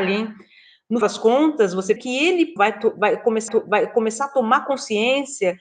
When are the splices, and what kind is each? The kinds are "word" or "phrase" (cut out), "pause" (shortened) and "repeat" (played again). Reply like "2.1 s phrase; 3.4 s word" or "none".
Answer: 1.0 s word; 2.0 s word; 2.6 s word; 3.5 s repeat